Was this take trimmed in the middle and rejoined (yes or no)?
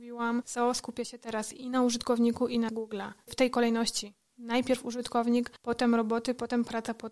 yes